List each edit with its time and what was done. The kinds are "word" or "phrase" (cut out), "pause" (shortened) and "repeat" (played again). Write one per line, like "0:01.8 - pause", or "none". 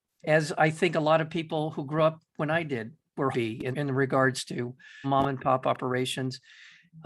0:03.3 - phrase
0:03.7 - word
0:05.0 - word